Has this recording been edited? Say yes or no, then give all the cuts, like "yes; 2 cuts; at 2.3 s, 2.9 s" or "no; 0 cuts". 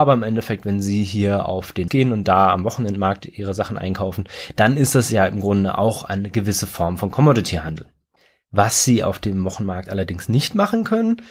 yes; 1 cut; at 1.9 s